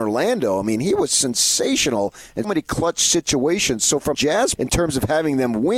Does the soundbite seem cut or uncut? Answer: cut